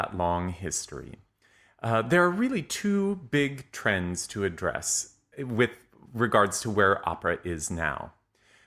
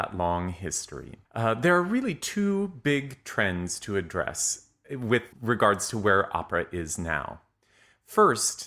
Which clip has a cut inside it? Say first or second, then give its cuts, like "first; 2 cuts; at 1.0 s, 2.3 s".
second; 2 cuts; at 1.3 s, 5.3 s